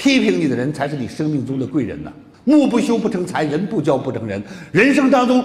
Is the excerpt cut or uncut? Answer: cut